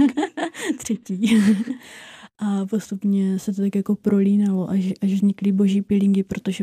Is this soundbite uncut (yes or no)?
yes